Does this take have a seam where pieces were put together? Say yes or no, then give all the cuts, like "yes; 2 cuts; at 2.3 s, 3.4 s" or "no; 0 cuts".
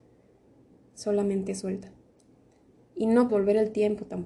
yes; 1 cut; at 3.3 s